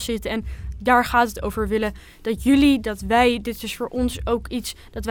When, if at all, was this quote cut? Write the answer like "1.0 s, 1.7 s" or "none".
none